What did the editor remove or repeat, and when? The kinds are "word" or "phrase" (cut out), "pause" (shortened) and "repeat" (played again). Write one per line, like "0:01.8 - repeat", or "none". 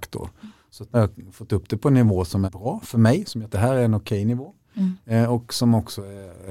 0:00.9 - word
0:02.4 - word
0:03.5 - phrase